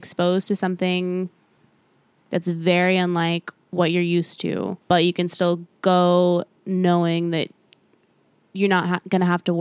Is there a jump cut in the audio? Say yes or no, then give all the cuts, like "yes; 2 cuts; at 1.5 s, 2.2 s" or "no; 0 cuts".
no; 0 cuts